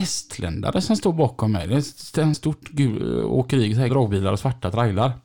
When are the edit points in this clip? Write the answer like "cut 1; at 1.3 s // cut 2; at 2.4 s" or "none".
cut 1; at 2.3 s // cut 2; at 3.9 s